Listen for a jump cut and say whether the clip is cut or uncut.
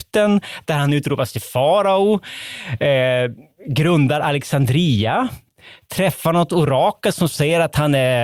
uncut